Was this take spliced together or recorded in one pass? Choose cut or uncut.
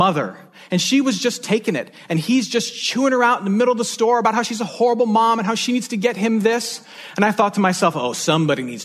uncut